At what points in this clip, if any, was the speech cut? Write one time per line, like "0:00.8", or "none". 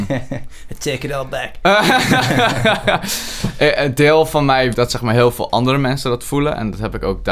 0:04.7